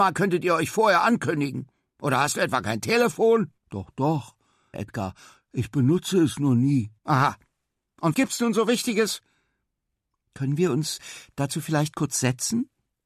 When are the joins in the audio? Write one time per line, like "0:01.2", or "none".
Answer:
0:03.6
0:04.7
0:07.0
0:08.1